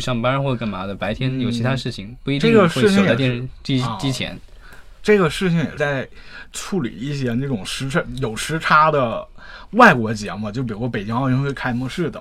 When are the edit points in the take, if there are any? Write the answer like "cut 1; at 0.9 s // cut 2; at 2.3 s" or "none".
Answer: cut 1; at 5.8 s

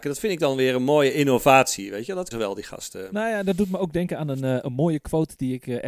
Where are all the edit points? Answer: cut 1; at 2.3 s

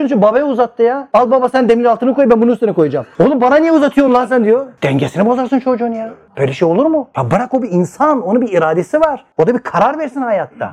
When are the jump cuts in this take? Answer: none

